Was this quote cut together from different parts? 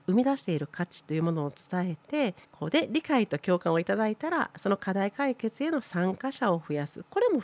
yes; 1 cut; at 2.4 s

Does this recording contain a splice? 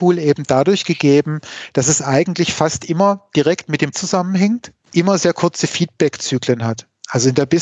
yes; 1 cut; at 3.9 s

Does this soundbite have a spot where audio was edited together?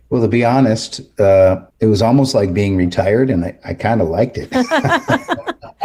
yes; 1 cut; at 1.7 s

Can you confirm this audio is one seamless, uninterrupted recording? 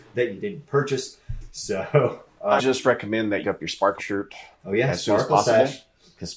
no; 4 cuts; at 2.6 s, 3.4 s, 4.0 s, 4.5 s

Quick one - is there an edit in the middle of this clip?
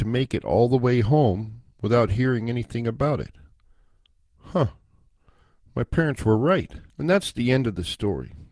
yes; 2 cuts; at 1.7 s, 6.9 s

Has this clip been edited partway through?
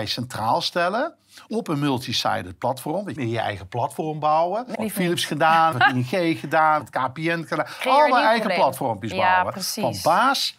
yes; 5 cuts; at 1.5 s, 3.2 s, 4.7 s, 5.7 s, 6.8 s

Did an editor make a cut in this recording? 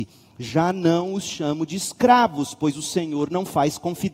no; 0 cuts

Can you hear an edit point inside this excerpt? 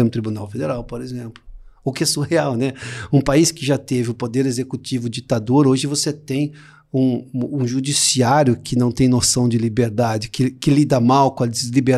no; 0 cuts

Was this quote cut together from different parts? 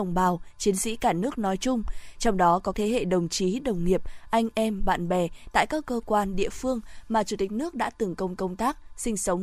yes; 2 cuts; at 2.7 s, 8.4 s

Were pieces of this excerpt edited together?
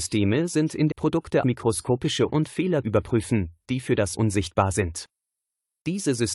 yes; 5 cuts; at 0.9 s, 1.4 s, 2.3 s, 2.8 s, 4.1 s

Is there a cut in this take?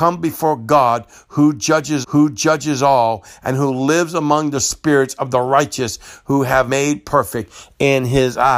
yes; 2 cuts; at 2.0 s, 6.7 s

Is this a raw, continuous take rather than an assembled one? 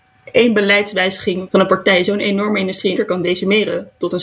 no; 2 cuts; at 1.5 s, 3.0 s

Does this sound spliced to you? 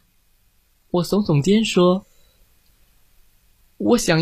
no; 0 cuts

